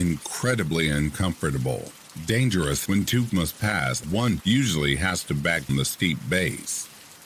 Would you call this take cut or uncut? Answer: cut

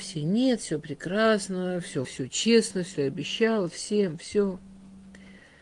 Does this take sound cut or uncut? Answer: cut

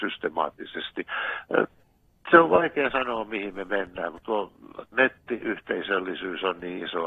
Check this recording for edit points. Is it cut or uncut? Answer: uncut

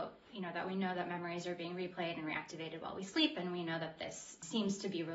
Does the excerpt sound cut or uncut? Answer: uncut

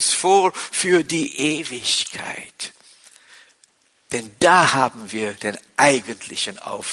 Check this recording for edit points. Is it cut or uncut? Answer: uncut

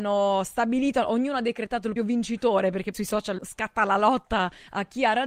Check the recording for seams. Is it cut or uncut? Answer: cut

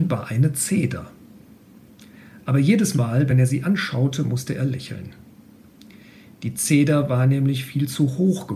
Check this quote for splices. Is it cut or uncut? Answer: uncut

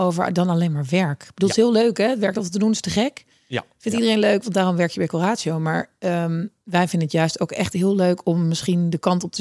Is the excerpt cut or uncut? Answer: uncut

